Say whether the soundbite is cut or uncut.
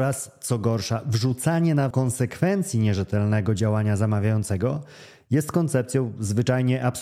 cut